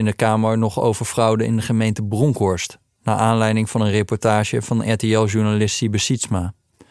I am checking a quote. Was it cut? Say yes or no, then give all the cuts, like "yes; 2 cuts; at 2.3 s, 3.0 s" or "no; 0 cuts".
no; 0 cuts